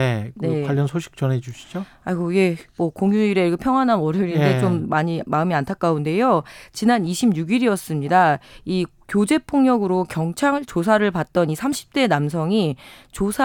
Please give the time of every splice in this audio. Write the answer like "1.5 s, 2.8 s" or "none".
2.7 s